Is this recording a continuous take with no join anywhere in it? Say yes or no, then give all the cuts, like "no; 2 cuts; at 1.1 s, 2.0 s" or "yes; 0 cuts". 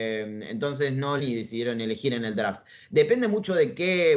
no; 1 cut; at 1.2 s